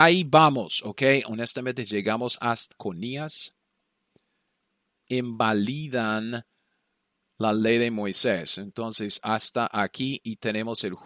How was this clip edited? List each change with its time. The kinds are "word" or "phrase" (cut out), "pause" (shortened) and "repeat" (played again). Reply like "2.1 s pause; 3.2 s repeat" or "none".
2.7 s phrase; 5.1 s phrase